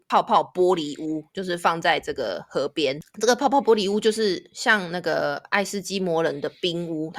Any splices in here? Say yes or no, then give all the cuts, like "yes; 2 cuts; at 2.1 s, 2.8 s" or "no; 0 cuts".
no; 0 cuts